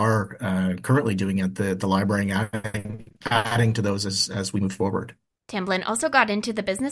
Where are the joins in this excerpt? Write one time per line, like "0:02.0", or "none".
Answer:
none